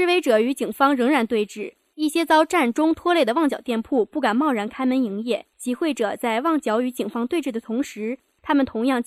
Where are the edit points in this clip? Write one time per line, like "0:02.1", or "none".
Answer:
0:05.5